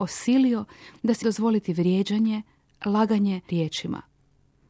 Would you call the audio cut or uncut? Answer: cut